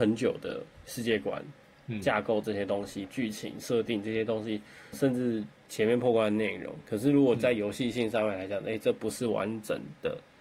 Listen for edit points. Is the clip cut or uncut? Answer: cut